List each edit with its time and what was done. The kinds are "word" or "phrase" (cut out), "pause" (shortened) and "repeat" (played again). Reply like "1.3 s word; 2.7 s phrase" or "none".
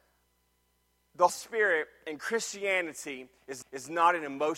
1.3 s word; 3.6 s repeat